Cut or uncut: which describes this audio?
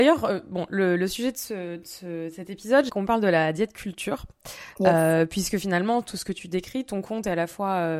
cut